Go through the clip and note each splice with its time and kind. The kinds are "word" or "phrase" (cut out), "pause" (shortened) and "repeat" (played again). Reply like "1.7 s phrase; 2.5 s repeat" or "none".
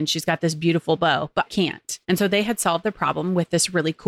1.5 s word; 2.0 s pause